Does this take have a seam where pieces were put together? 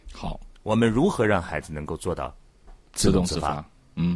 no; 0 cuts

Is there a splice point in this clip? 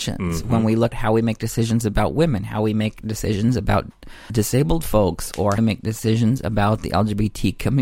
yes; 3 cuts; at 0.9 s, 4.3 s, 5.6 s

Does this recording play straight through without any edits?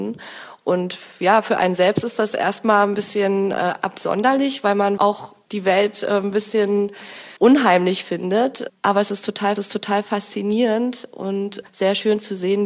no; 4 cuts; at 5.0 s, 7.4 s, 9.6 s, 11.7 s

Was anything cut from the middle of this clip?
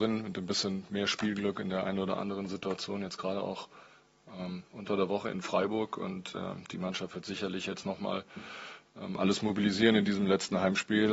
no; 0 cuts

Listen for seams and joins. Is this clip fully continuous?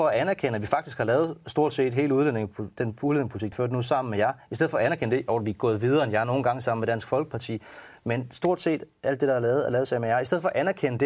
no; 1 cut; at 3.5 s

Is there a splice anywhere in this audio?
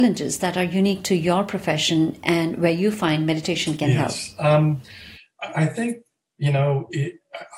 no; 0 cuts

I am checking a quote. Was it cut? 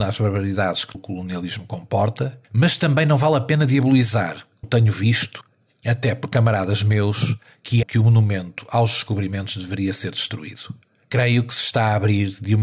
yes; 4 cuts; at 0.9 s, 2.4 s, 4.6 s, 7.8 s

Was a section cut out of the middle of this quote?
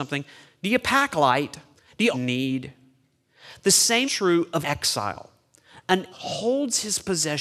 yes; 5 cuts; at 1.8 s, 2.1 s, 4.0 s, 4.6 s, 6.1 s

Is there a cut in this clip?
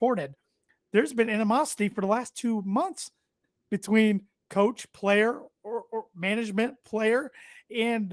no; 0 cuts

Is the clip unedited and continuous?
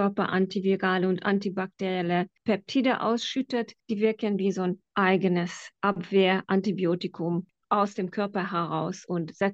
yes; 0 cuts

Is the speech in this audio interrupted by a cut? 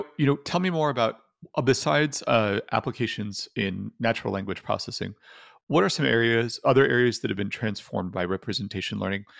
no; 0 cuts

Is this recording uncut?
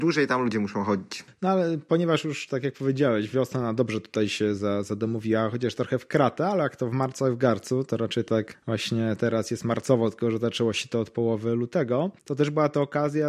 yes; 0 cuts

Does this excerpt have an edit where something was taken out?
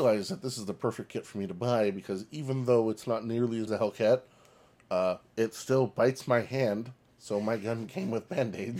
yes; 1 cut; at 3.7 s

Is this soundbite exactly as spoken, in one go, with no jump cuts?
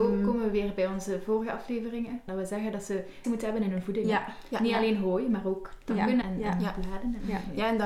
no; 3 cuts; at 2.3 s, 3.2 s, 6.2 s

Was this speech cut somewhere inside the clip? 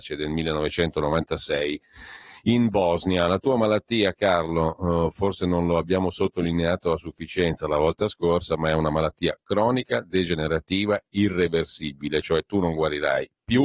no; 0 cuts

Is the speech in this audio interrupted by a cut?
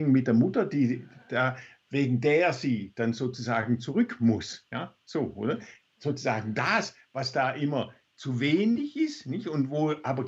no; 0 cuts

